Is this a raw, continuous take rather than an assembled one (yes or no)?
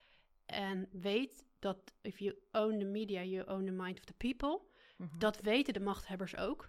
yes